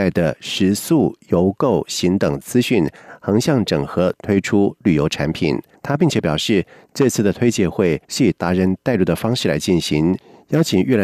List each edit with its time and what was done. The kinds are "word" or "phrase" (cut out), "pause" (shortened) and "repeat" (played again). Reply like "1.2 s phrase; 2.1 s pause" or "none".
5.7 s pause; 8.0 s pause

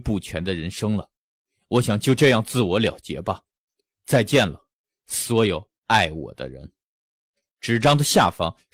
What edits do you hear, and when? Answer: none

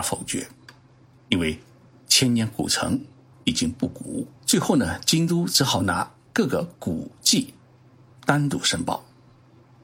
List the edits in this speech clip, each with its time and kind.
4.4 s pause

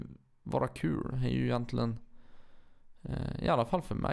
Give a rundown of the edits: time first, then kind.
none

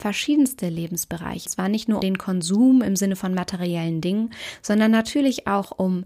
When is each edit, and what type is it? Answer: 1.5 s word; 2.0 s word

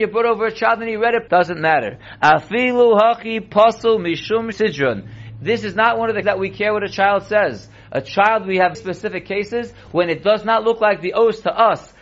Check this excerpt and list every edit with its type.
1.3 s word; 4.5 s word; 6.2 s word; 8.7 s word

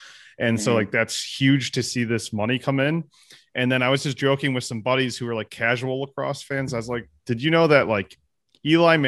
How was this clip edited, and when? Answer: none

